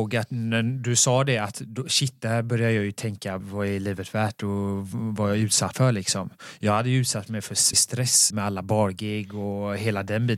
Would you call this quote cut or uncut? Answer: cut